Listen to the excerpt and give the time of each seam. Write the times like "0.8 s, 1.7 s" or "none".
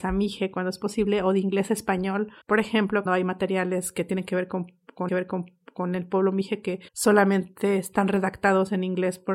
2.4 s, 3.1 s, 5.1 s, 6.9 s

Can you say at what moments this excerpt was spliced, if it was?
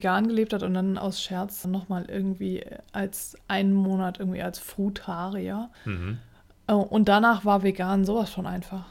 1.6 s, 5.7 s

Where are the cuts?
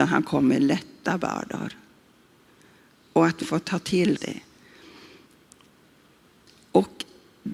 3.4 s, 4.2 s

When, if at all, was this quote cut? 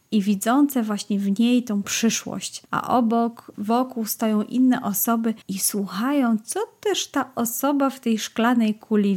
2.6 s, 3.5 s, 5.4 s

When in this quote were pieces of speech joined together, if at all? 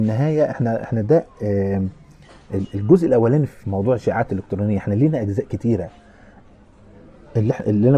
none

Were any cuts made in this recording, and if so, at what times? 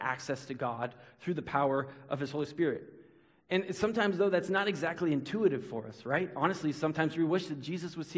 none

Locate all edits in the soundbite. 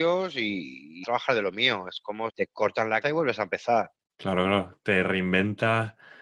1.0 s, 2.3 s, 3.0 s, 4.1 s

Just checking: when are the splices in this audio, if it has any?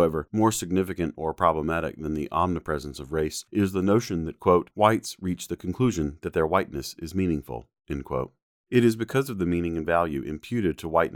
none

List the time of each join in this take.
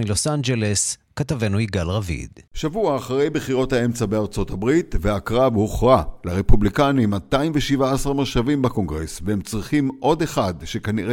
2.5 s

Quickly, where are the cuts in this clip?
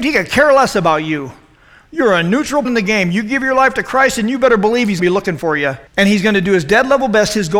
2.6 s, 5.0 s, 5.9 s

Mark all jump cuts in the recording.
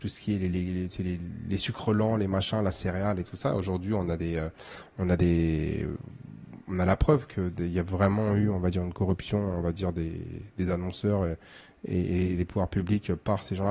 none

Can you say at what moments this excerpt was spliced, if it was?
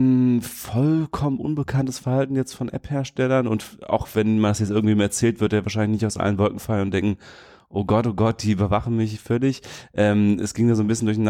none

